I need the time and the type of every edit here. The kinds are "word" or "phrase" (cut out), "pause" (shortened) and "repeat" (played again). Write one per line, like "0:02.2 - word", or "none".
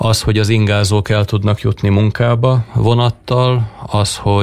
none